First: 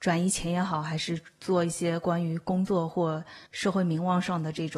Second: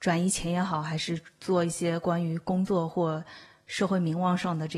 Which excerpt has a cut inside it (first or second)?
first